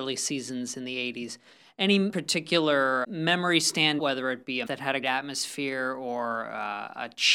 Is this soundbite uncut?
no; 5 cuts; at 2.1 s, 3.0 s, 4.0 s, 4.7 s, 5.0 s

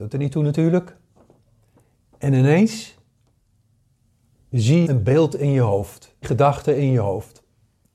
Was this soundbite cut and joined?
yes; 2 cuts; at 4.9 s, 6.2 s

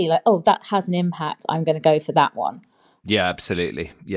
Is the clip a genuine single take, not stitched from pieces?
yes; 0 cuts

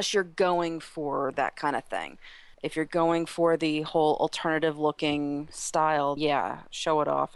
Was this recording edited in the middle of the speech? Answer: yes; 2 cuts; at 2.5 s, 6.2 s

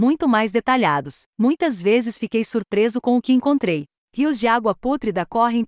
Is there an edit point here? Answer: yes; 1 cut; at 1.3 s

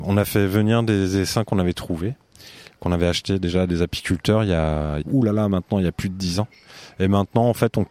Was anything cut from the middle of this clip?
yes; 1 cut; at 5.0 s

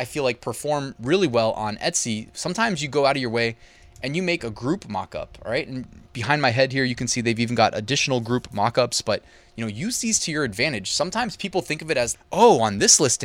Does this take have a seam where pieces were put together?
yes; 2 cuts; at 4.4 s, 12.1 s

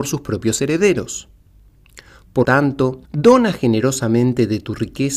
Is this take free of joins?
no; 2 cuts; at 2.4 s, 3.0 s

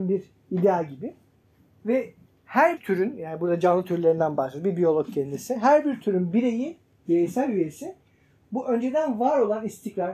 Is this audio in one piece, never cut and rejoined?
no; 1 cut; at 2.8 s

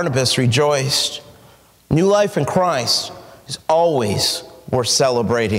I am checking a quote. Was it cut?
no; 0 cuts

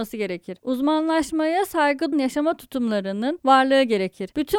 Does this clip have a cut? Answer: yes; 1 cut; at 2.1 s

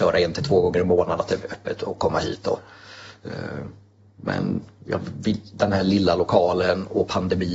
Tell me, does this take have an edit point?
no; 0 cuts

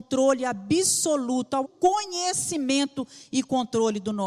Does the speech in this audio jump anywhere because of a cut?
yes; 1 cut; at 1.6 s

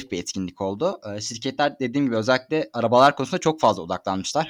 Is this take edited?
no; 0 cuts

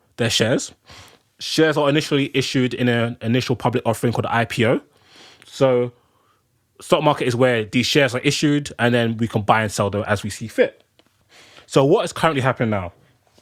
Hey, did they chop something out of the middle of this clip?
yes; 1 cut; at 11.2 s

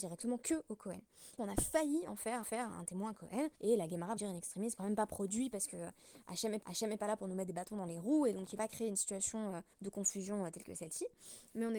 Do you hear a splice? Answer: yes; 8 cuts; at 1.4 s, 2.4 s, 3.5 s, 4.2 s, 4.8 s, 6.6 s, 8.6 s, 9.7 s

